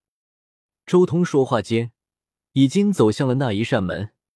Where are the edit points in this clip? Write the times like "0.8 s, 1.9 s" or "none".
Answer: none

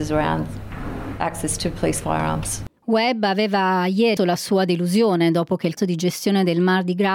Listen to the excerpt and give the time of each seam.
2.8 s, 4.2 s, 5.8 s

